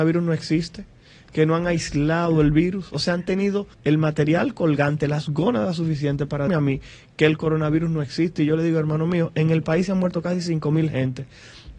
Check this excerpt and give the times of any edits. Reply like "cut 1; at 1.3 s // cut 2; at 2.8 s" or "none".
cut 1; at 3.7 s // cut 2; at 6.5 s